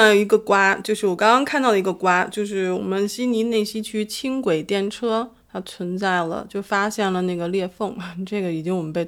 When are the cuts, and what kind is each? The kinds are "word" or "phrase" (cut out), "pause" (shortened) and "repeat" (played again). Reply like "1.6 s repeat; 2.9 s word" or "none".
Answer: none

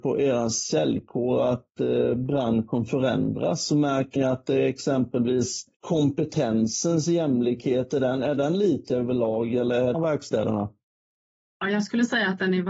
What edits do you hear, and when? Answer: 4.2 s word; 5.7 s pause; 9.9 s phrase

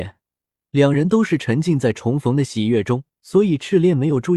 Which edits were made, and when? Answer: 3.2 s pause

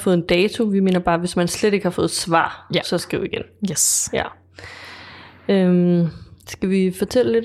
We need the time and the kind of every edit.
none

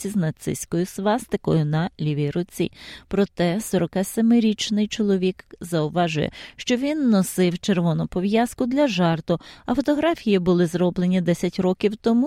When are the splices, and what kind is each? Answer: none

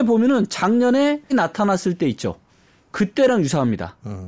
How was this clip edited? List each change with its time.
1.3 s word

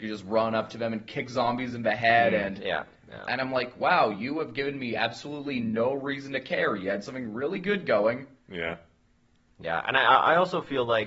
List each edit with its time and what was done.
none

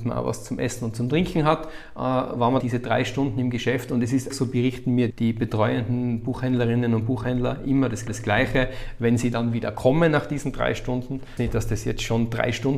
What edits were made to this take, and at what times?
2.6 s word; 4.3 s word; 5.1 s word; 8.1 s repeat; 11.4 s phrase

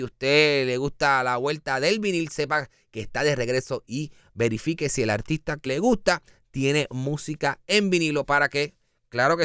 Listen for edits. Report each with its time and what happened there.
5.7 s word

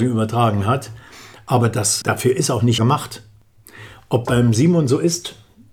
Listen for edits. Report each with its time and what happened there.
2.0 s word; 2.8 s word; 4.2 s word

